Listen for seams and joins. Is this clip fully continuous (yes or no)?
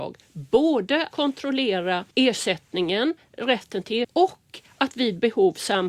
no